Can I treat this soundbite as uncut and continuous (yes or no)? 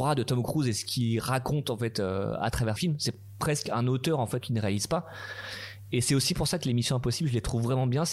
no